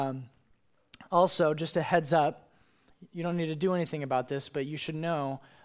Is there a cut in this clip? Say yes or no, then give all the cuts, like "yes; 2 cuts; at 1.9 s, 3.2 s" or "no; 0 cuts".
no; 0 cuts